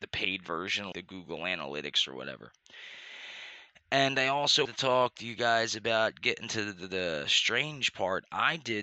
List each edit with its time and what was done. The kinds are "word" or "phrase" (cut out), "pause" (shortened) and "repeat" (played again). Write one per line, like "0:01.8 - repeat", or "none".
0:00.9 - word
0:04.6 - word

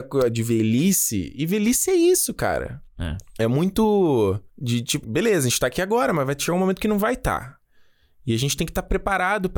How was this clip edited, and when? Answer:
0:04.5 - pause
0:05.0 - word

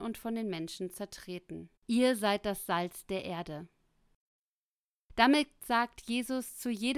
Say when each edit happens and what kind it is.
0:01.8 - pause

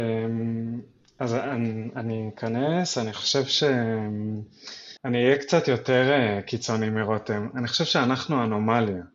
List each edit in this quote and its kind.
0:05.0 - pause

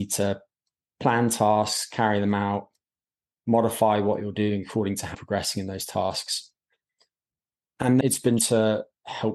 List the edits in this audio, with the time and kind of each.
0:05.1 - word
0:08.0 - word
0:08.4 - word

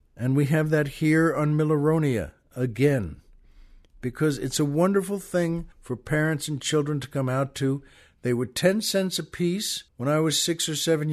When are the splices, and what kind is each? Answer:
0:05.7 - pause
0:09.9 - pause

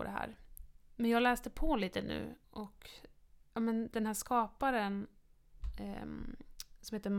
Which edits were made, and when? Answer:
0:02.4 - pause

